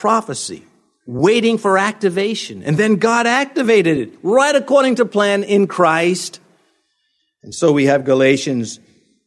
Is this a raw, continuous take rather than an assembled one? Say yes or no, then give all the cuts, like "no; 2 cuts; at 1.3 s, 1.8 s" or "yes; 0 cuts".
yes; 0 cuts